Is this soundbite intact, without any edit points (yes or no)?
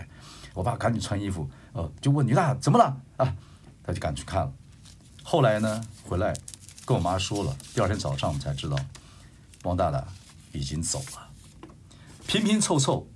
yes